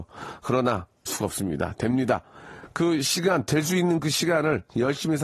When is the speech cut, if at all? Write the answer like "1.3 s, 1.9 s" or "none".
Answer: 1.1 s